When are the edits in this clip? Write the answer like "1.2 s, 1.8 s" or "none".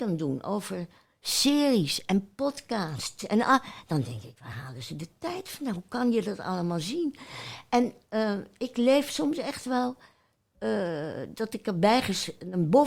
none